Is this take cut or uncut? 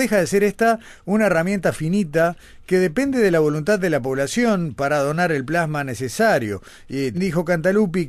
cut